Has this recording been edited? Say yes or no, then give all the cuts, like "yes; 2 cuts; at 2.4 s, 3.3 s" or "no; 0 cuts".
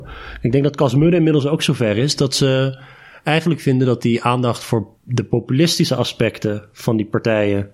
yes; 1 cut; at 5.0 s